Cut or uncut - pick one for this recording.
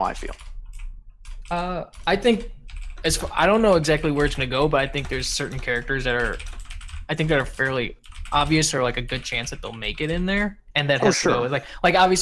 uncut